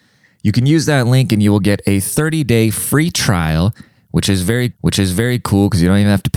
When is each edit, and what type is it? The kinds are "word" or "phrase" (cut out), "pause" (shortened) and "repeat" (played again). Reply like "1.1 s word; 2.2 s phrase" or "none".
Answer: 4.7 s repeat